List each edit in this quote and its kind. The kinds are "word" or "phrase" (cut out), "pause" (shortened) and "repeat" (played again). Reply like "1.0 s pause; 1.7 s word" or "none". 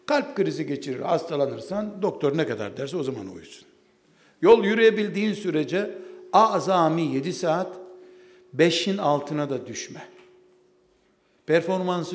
none